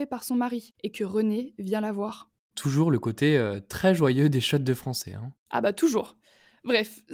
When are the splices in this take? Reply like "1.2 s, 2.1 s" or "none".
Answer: none